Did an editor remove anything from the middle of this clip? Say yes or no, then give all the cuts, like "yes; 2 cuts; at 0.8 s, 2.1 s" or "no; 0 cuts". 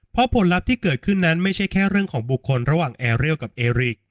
no; 0 cuts